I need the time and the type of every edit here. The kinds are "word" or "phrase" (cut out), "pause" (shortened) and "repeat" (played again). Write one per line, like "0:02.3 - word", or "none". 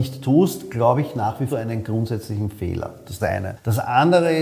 0:01.5 - phrase
0:03.2 - word